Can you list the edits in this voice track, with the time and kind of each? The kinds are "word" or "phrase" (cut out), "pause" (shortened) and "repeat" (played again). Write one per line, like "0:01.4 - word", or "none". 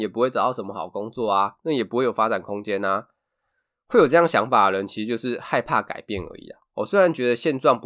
0:06.7 - pause